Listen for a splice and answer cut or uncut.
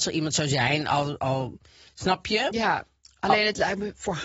uncut